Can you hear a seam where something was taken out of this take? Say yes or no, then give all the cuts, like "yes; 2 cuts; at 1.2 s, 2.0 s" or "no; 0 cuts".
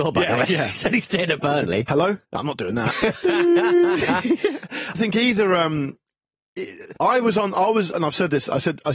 yes; 3 cuts; at 2.2 s, 4.9 s, 7.0 s